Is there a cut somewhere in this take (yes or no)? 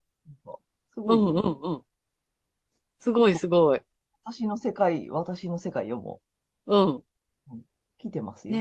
no